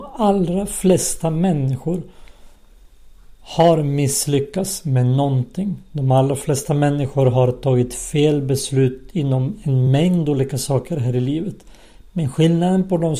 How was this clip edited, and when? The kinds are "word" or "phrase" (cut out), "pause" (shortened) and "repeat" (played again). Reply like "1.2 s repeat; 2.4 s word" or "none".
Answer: none